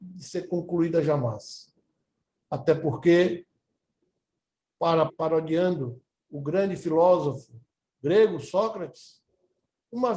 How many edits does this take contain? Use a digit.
1